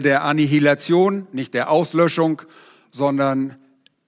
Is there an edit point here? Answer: no; 0 cuts

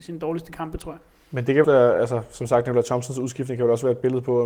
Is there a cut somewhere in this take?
yes; 1 cut; at 1.6 s

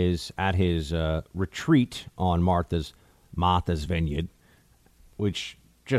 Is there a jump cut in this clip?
no; 0 cuts

